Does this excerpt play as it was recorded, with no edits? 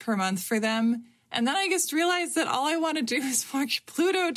yes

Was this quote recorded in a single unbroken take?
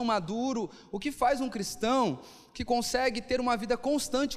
yes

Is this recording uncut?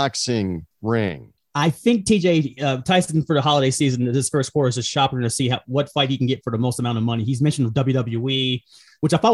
no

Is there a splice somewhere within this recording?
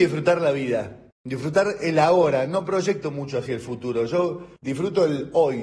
yes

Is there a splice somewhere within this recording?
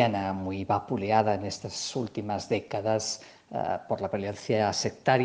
no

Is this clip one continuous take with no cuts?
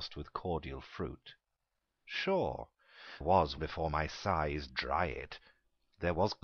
no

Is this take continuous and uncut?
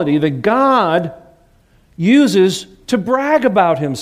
yes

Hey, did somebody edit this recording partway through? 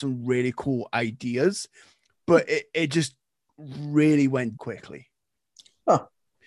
yes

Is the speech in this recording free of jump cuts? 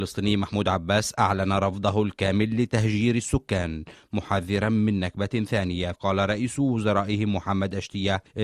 no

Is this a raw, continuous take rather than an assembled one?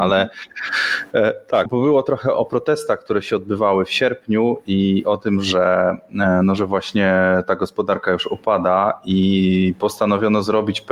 no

